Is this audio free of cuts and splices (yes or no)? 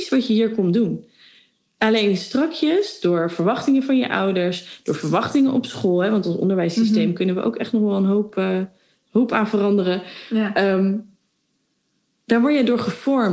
yes